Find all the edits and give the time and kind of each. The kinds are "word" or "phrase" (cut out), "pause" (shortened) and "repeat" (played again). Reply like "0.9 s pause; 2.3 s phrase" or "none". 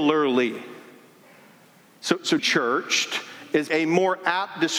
2.4 s word; 3.7 s word

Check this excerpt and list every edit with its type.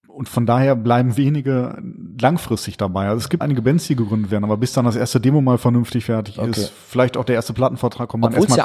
3.4 s word

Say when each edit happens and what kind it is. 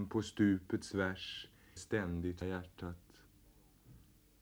1.8 s phrase; 2.4 s word

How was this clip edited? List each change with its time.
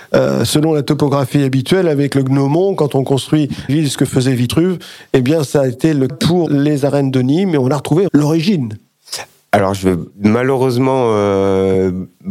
3.7 s word; 6.1 s word; 6.5 s phrase; 8.1 s word; 10.1 s pause

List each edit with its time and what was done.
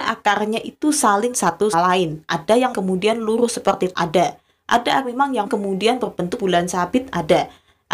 1.3 s word; 1.7 s word; 2.7 s word; 3.9 s word; 5.0 s word; 5.5 s word; 6.4 s word

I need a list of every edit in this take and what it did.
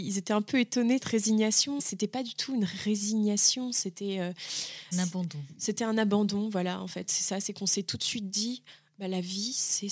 1.0 s word; 1.8 s word; 4.9 s word

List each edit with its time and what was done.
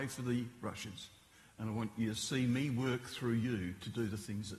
1.3 s pause

